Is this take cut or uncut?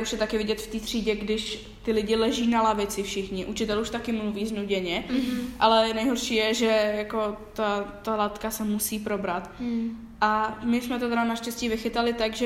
uncut